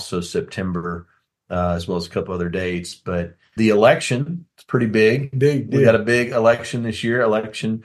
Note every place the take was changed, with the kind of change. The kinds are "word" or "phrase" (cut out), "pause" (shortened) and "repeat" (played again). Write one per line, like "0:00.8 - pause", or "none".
0:03.6 - word

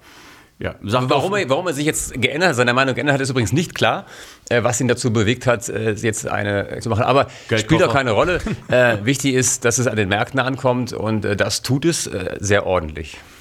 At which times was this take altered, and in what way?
0:06.8 - word

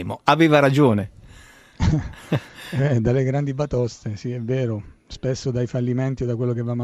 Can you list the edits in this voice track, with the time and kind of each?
none

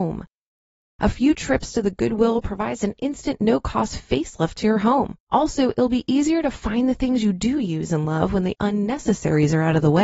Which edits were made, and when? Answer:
0:05.2 - pause

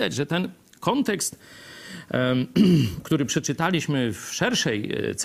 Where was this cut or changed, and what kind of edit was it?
none

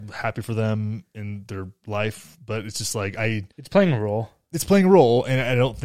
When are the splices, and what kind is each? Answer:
0:03.5 - pause

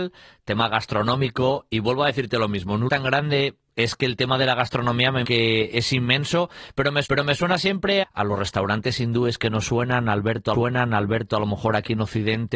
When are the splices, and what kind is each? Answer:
0:02.9 - word
0:05.2 - word
0:07.0 - repeat
0:08.0 - word
0:10.5 - repeat

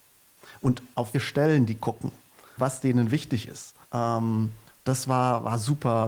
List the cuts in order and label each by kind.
0:01.1 - word
0:02.6 - word
0:03.8 - pause

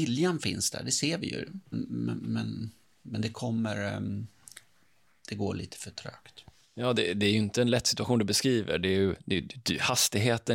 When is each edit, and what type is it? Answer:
0:01.7 - word

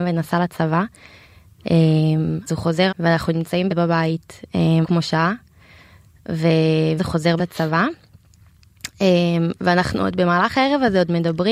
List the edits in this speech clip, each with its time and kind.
0:02.5 - word
0:02.9 - word
0:03.7 - word
0:04.8 - word
0:07.0 - word
0:07.4 - word

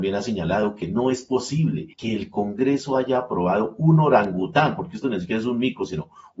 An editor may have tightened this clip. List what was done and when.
0:01.9 - pause

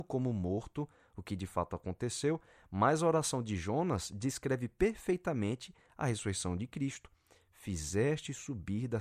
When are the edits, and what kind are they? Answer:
none

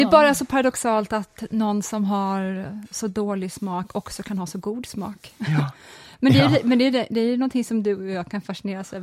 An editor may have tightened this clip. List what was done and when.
none

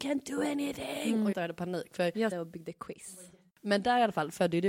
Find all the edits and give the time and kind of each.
0:01.3 - phrase
0:02.3 - phrase

